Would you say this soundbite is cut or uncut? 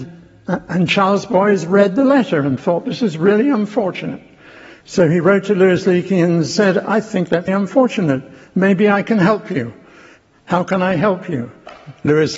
cut